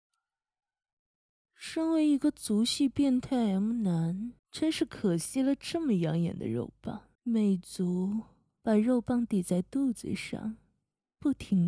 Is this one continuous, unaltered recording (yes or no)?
no